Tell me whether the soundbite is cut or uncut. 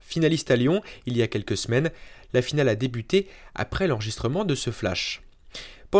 uncut